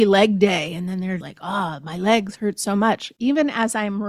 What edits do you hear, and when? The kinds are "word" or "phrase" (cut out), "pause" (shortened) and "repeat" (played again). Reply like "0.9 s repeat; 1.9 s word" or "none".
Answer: 1.2 s word